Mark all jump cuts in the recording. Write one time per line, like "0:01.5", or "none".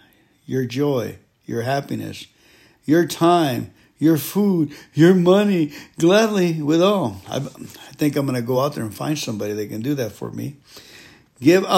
none